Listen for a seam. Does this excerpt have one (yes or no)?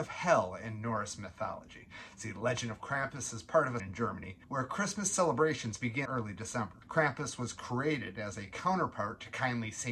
yes